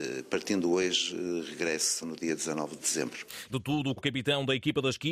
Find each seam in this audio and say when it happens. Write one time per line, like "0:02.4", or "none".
0:02.0
0:02.8
0:03.5
0:04.0